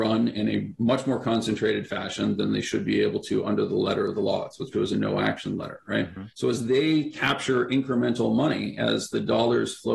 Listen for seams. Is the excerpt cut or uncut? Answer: cut